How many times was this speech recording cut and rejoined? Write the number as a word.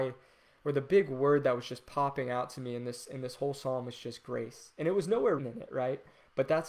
one